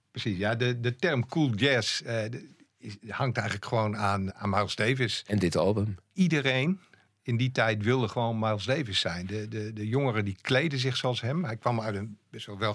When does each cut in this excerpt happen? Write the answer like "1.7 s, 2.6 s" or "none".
4.3 s